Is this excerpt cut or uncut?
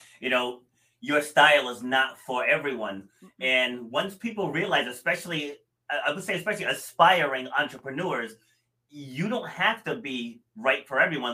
uncut